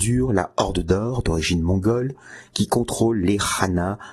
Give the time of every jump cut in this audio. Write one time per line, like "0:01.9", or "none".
none